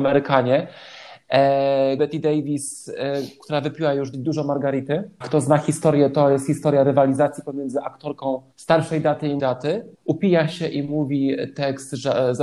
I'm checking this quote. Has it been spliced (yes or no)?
yes